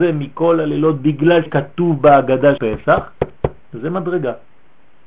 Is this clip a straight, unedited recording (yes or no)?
no